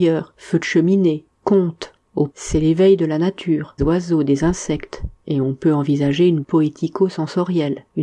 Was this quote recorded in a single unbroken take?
no; 3 cuts; at 2.3 s, 3.8 s, 6.4 s

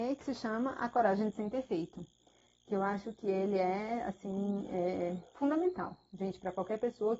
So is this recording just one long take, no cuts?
no; 1 cut; at 5.3 s

